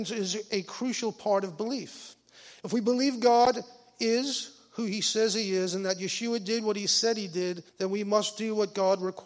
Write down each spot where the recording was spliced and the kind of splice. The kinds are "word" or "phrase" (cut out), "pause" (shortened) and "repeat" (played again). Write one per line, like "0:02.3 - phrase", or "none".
0:07.7 - pause